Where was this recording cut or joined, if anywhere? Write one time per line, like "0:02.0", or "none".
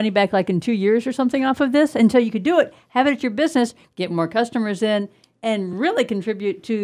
none